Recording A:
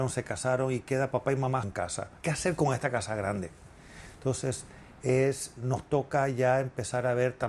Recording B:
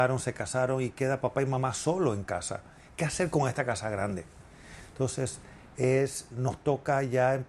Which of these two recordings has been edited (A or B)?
A